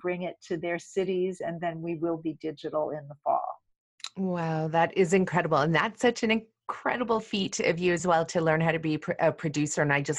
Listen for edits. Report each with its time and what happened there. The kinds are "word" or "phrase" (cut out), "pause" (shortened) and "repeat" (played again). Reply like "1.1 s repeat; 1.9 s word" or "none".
none